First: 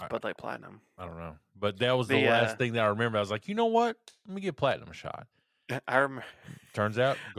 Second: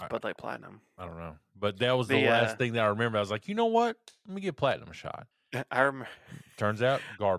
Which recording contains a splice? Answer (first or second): second